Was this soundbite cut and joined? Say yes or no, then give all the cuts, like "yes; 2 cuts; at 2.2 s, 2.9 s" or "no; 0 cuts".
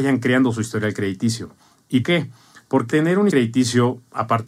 yes; 3 cuts; at 2.0 s, 2.9 s, 3.3 s